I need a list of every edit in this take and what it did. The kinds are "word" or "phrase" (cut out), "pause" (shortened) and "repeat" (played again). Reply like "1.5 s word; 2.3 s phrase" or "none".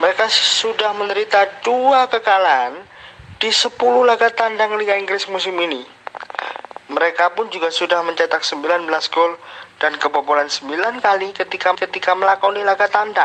11.7 s repeat